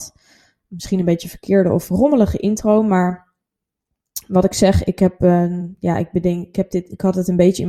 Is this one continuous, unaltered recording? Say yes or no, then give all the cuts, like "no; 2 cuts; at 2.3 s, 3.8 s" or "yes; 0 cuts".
yes; 0 cuts